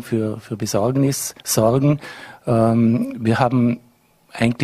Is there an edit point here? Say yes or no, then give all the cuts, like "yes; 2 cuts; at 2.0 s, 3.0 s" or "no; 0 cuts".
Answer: yes; 1 cut; at 1.4 s